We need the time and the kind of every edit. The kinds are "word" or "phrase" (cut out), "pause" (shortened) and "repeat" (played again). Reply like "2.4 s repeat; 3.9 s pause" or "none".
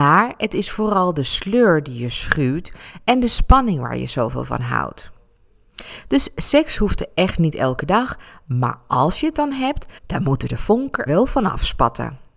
10.0 s pause; 11.1 s word